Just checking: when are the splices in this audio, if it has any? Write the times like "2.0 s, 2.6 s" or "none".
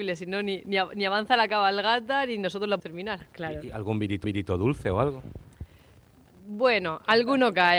2.8 s, 4.2 s